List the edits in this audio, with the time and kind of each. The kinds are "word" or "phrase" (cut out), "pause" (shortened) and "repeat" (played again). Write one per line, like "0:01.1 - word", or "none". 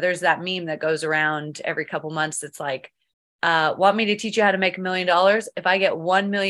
none